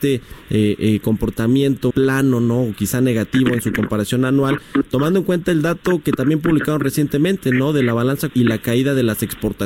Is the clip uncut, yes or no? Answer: no